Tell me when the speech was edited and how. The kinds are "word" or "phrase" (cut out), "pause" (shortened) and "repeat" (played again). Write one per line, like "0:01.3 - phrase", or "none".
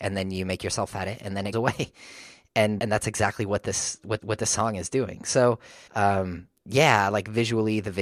0:00.9 - word
0:01.5 - word
0:02.8 - word
0:04.2 - repeat
0:05.9 - pause